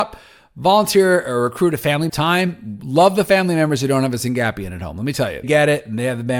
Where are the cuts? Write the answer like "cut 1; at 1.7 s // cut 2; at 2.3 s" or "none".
cut 1; at 2.1 s // cut 2; at 5.4 s